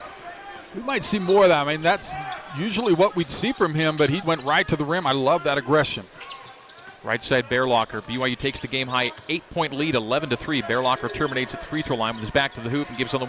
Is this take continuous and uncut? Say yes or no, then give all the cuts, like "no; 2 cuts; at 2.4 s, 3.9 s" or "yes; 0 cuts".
no; 1 cut; at 4.2 s